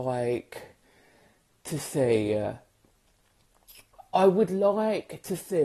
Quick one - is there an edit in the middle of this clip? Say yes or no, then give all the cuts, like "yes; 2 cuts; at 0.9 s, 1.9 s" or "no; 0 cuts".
no; 0 cuts